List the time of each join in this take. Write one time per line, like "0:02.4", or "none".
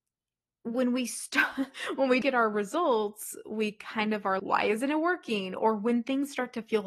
0:02.2
0:04.4